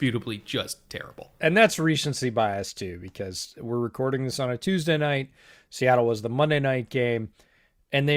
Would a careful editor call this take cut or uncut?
uncut